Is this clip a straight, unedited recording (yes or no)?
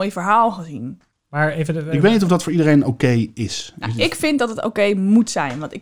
yes